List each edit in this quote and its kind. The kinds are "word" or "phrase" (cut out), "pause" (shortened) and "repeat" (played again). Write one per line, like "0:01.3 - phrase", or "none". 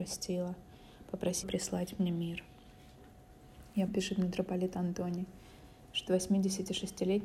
0:01.4 - word
0:03.9 - word
0:06.1 - word